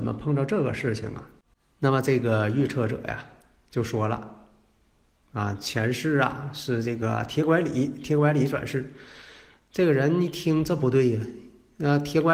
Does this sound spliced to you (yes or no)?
no